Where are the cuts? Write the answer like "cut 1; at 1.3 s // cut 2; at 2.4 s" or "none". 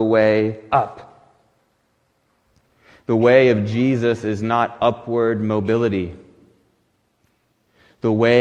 none